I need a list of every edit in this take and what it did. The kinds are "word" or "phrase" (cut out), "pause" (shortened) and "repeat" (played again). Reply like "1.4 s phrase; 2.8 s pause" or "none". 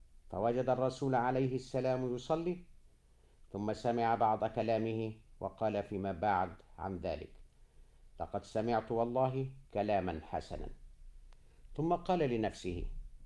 9.6 s pause